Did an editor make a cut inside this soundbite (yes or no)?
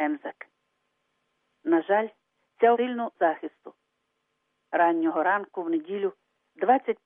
yes